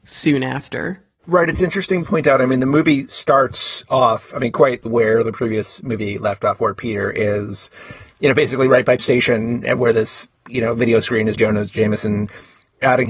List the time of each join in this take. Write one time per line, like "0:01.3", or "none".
0:02.0
0:04.9
0:09.0
0:11.4

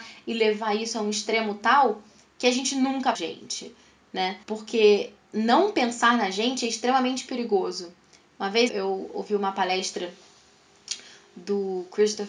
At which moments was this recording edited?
0:03.1
0:04.4
0:08.7

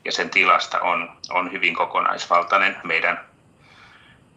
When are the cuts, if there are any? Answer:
0:01.2
0:02.8

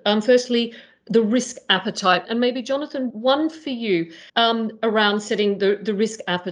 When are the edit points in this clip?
0:02.3
0:03.1
0:04.3

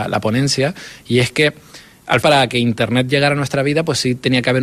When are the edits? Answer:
0:02.2

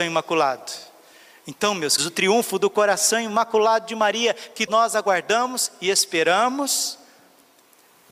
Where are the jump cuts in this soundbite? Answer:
0:02.0
0:04.7

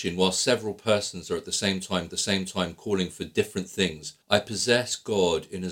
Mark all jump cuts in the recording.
0:02.1
0:04.2

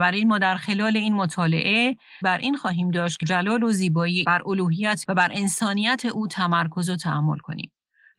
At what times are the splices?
0:02.2
0:03.2
0:04.2
0:05.0

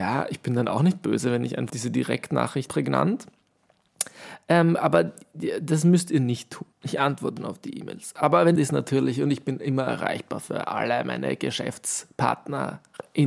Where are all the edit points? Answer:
0:01.7
0:02.7
0:06.7
0:07.4
0:08.6

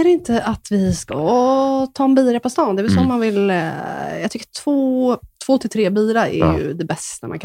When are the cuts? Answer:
none

